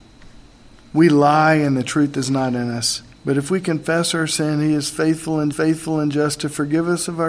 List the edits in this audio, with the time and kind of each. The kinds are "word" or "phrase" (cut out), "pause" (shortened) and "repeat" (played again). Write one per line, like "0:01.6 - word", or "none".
0:03.1 - pause
0:05.5 - repeat

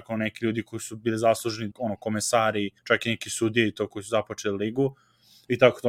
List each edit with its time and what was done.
0:01.7 - word
0:02.8 - pause

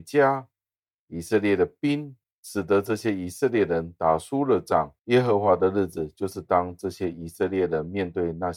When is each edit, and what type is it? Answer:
0:02.2 - pause
0:05.0 - pause

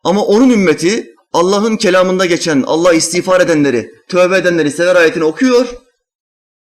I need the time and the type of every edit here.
none

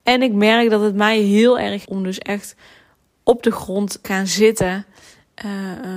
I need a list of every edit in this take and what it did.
0:01.8 - word
0:04.0 - word

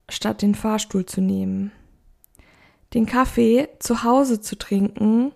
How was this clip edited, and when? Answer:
none

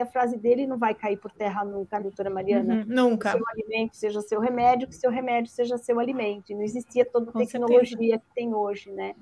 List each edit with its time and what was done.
0:02.0 - word

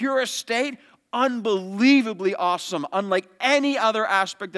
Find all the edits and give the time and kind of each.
none

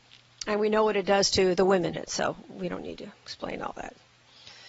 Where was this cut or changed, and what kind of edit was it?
0:01.9 - phrase

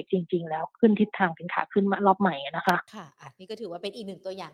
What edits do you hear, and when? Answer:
0:02.9 - pause

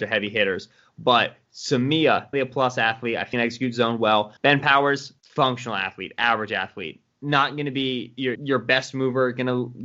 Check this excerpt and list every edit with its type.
0:02.3 - word
0:03.3 - phrase
0:04.4 - pause
0:05.2 - pause
0:08.3 - word

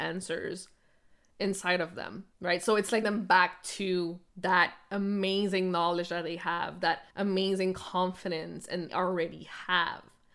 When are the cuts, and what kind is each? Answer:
0:02.3 - pause
0:03.0 - word
0:04.3 - pause
0:07.1 - pause
0:08.9 - phrase

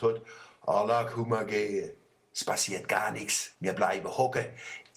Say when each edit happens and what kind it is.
0:03.5 - pause

